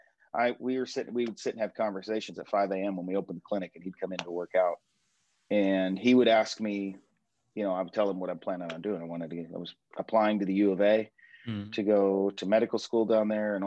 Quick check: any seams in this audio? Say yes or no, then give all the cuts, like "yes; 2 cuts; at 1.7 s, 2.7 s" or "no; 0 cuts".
no; 0 cuts